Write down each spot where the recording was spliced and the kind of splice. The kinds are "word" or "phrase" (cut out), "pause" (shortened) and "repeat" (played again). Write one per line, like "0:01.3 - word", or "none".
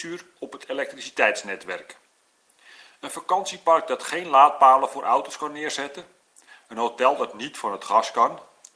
none